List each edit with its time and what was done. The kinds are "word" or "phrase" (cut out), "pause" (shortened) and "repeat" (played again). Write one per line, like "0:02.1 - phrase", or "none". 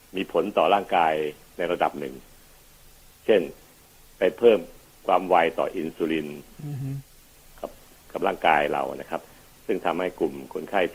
none